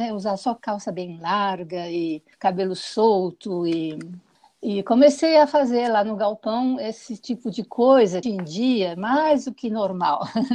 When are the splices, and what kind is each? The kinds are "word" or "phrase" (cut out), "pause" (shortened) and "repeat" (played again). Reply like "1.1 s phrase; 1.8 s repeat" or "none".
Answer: 2.3 s pause; 4.3 s pause; 8.2 s phrase